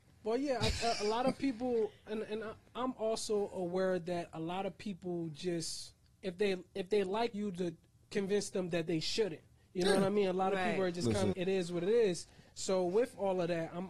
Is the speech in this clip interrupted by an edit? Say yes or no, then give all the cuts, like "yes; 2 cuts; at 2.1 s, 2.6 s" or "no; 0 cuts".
yes; 2 cuts; at 7.3 s, 11.3 s